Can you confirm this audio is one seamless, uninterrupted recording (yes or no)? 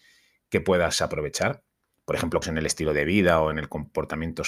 no